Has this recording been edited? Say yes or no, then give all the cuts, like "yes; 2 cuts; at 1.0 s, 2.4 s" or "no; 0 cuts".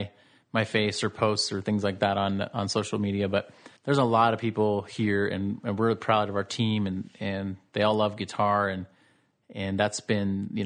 yes; 1 cut; at 3.8 s